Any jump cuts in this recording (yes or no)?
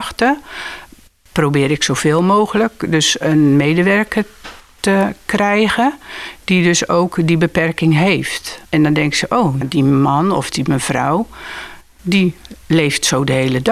yes